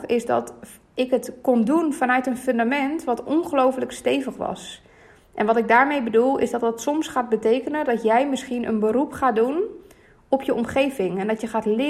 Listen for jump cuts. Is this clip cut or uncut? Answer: uncut